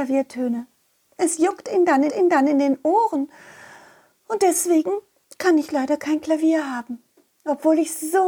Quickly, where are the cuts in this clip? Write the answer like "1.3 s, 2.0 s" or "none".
2.1 s, 5.2 s